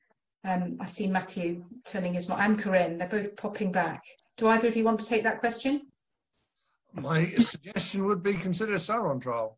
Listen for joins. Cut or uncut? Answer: uncut